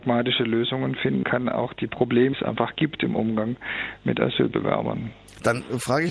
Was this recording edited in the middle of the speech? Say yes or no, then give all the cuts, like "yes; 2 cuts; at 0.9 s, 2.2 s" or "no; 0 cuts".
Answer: yes; 2 cuts; at 1.2 s, 2.3 s